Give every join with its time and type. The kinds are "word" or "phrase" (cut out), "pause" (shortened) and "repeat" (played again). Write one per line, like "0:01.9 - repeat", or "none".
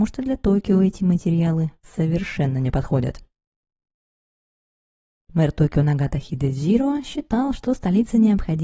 none